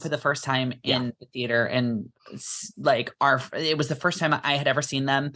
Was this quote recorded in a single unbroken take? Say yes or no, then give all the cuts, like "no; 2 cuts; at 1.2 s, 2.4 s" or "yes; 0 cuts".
yes; 0 cuts